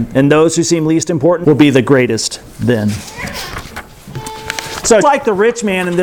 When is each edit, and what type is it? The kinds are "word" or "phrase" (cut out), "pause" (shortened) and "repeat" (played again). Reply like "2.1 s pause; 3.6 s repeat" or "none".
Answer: 1.4 s word; 5.0 s word